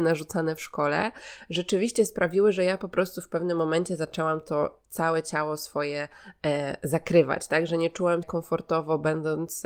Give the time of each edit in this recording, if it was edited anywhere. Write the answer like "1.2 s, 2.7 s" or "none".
8.2 s